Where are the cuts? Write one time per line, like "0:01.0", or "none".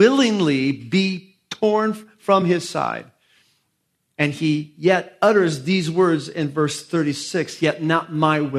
none